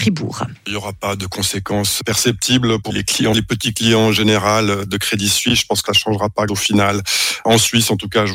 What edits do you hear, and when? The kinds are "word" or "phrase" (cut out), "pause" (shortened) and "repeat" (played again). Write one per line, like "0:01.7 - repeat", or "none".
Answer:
0:02.9 - word
0:03.3 - word
0:05.9 - word
0:06.5 - word